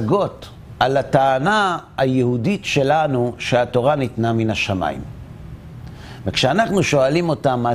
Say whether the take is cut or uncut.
uncut